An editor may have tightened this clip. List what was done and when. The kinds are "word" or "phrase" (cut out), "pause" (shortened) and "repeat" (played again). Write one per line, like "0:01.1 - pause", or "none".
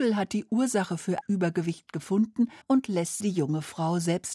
0:01.2 - word
0:02.6 - pause
0:03.2 - word